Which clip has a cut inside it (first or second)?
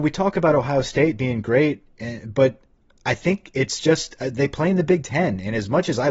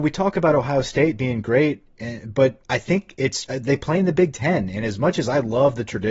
second